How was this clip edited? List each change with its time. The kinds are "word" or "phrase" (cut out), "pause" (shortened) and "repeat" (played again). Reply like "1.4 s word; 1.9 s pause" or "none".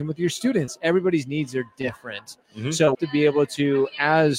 2.9 s phrase